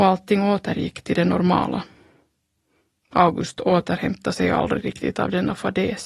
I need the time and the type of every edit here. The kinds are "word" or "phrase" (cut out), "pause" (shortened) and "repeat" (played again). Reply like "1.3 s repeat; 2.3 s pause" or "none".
none